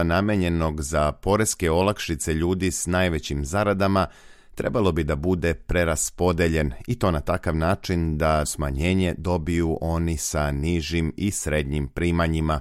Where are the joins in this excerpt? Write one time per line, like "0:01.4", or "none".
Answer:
0:08.4